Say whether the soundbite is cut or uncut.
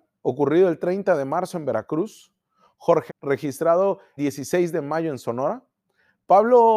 cut